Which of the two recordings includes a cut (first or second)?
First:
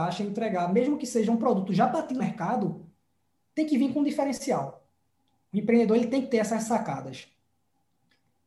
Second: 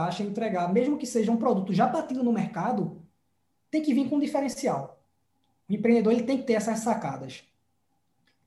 first